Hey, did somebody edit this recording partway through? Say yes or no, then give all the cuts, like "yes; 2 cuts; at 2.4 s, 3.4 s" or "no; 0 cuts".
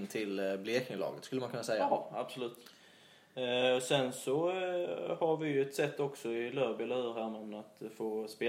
no; 0 cuts